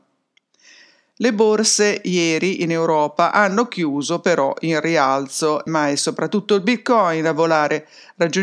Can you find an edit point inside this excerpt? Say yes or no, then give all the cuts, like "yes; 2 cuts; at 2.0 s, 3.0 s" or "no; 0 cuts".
yes; 1 cut; at 5.7 s